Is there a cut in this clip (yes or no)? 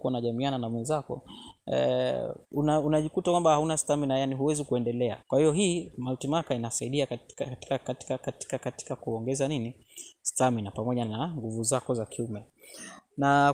yes